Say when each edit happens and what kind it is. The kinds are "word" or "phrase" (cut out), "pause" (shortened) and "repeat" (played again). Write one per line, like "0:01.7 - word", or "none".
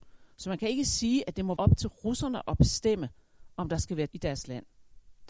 0:01.6 - word
0:04.1 - word